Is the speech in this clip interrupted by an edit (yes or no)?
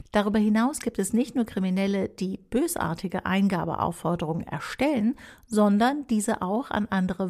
no